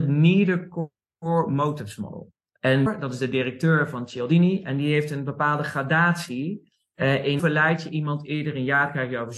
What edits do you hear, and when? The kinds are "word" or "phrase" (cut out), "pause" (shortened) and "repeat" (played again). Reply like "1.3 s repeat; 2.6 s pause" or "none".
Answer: 2.9 s word; 7.4 s word